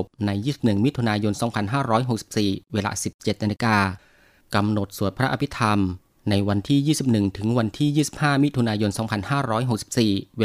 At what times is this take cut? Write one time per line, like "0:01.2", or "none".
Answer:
none

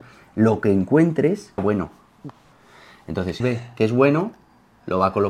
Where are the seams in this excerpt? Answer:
0:01.6
0:03.4

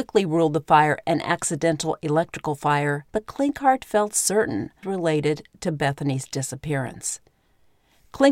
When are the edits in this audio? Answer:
0:03.1
0:04.8

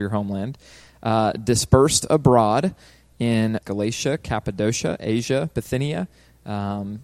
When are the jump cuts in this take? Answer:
0:03.6

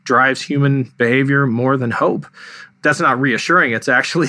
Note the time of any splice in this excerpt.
0:02.7

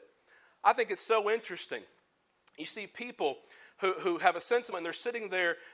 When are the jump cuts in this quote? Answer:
0:04.7

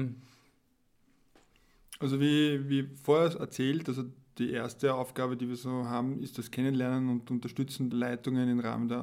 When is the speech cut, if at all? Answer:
0:07.9

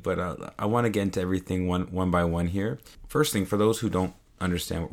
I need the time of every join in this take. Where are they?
none

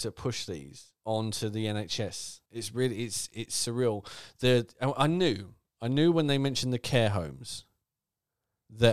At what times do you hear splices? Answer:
0:01.0
0:02.5

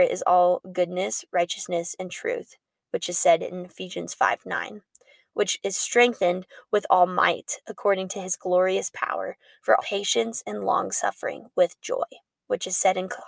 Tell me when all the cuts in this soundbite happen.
0:09.8

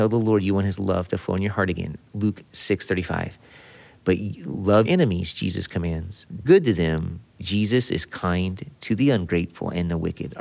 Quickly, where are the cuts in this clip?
0:04.9
0:06.4
0:07.3

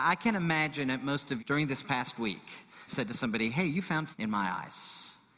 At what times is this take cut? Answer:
0:01.4
0:02.9
0:04.1

